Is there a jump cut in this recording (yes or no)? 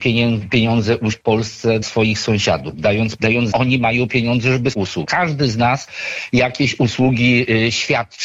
yes